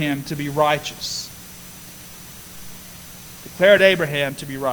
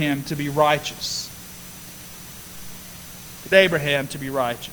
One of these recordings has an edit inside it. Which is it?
second; 1 cut; at 3.5 s

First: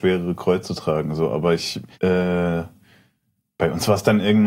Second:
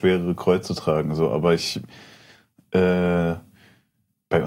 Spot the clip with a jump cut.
first; 1 cut; at 1.9 s

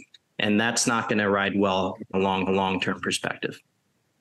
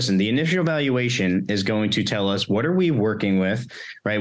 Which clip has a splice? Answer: first; 2 cuts; at 2.1 s, 2.5 s

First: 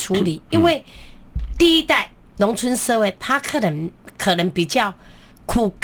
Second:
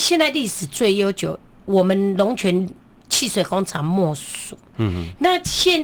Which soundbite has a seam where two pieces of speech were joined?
first; 1 cut; at 2.3 s

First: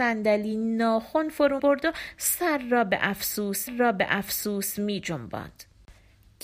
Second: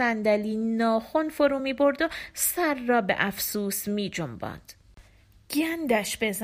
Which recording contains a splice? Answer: first; 2 cuts; at 1.6 s, 3.7 s

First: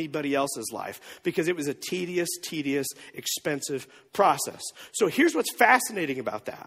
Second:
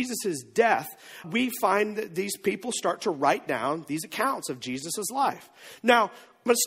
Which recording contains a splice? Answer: second; 1 cut; at 1.2 s

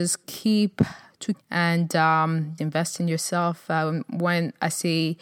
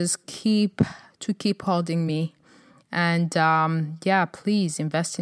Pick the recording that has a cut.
first; 2 cuts; at 1.3 s, 2.6 s

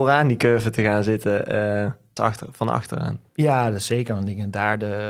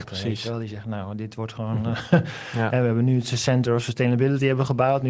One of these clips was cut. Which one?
first; 2 cuts; at 2.2 s, 3.3 s

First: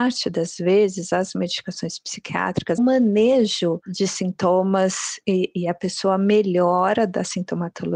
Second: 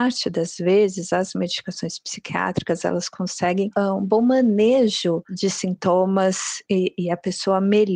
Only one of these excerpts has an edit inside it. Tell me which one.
first; 1 cut; at 2.8 s

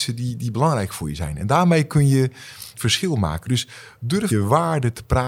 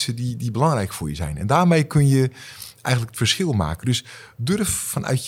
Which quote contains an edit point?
first; 2 cuts; at 2.7 s, 4.3 s

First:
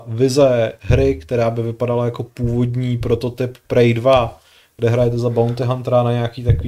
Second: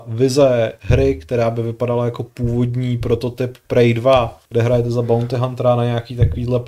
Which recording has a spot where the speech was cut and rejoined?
second; 1 cut; at 4.5 s

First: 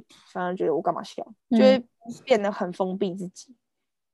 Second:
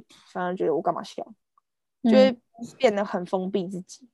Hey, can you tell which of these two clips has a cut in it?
first; 1 cut; at 1.4 s

